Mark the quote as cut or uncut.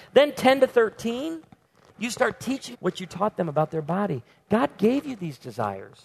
cut